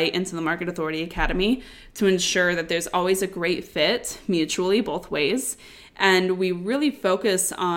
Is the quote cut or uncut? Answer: uncut